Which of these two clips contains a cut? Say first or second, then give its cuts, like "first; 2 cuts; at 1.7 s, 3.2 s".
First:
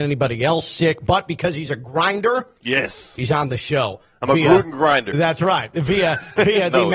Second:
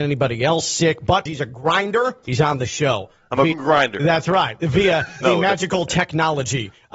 second; 4 cuts; at 1.3 s, 2.2 s, 3.5 s, 5.2 s